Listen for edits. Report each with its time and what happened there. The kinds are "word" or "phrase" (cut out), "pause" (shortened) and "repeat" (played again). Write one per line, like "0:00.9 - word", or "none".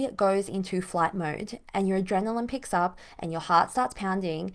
none